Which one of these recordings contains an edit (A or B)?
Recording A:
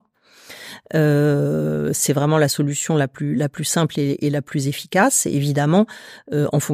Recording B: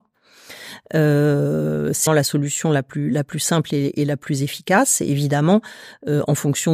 B